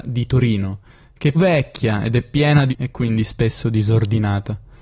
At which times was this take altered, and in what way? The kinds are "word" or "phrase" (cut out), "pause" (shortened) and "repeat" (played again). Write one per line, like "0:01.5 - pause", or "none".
0:01.3 - word
0:02.7 - word